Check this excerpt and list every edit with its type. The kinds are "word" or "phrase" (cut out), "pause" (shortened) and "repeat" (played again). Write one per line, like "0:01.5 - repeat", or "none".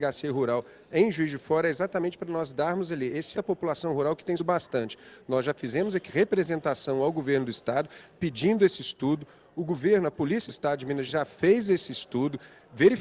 0:03.3 - word
0:04.4 - word
0:06.1 - word
0:10.5 - word
0:11.1 - word